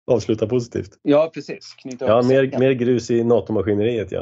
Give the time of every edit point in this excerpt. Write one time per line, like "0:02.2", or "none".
0:01.0